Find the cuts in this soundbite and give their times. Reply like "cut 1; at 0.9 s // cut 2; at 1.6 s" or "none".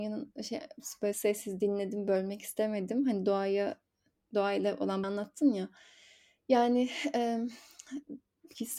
cut 1; at 1.1 s // cut 2; at 5.0 s